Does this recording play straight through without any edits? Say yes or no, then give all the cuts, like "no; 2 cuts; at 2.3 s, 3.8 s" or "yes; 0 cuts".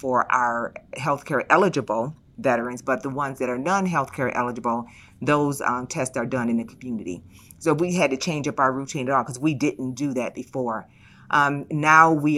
yes; 0 cuts